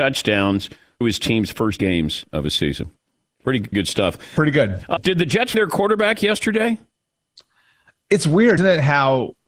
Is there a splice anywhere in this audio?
yes; 6 cuts; at 1.0 s, 1.8 s, 3.7 s, 5.0 s, 5.5 s, 8.6 s

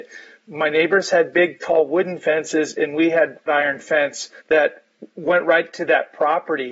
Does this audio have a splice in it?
yes; 2 cuts; at 3.5 s, 4.4 s

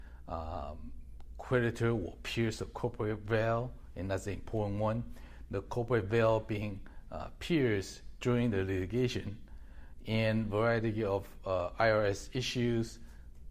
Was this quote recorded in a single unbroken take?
yes; 0 cuts

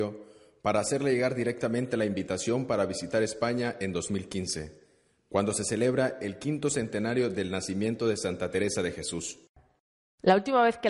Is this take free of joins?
yes; 0 cuts

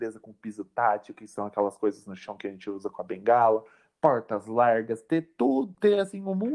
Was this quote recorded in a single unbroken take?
yes; 0 cuts

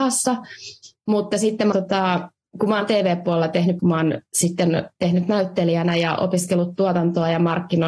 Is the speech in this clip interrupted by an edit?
yes; 4 cuts; at 1.7 s, 2.5 s, 3.8 s, 5.0 s

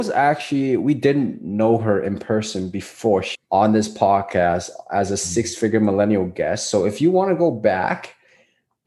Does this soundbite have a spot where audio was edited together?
yes; 1 cut; at 3.3 s

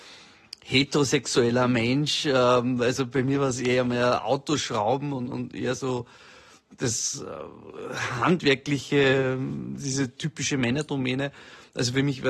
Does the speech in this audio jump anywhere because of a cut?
no; 0 cuts

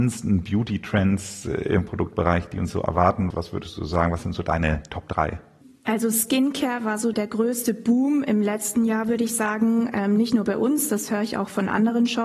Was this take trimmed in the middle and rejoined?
yes; 3 cuts; at 3.3 s, 5.6 s, 7.1 s

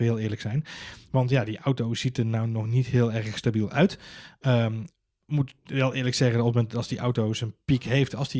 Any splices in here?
no; 0 cuts

